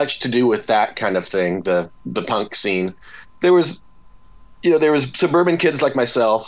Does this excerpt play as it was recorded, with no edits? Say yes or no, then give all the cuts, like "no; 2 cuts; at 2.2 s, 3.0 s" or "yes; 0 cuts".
yes; 0 cuts